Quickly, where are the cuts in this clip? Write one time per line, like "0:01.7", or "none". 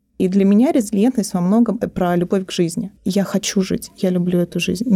0:01.8
0:03.0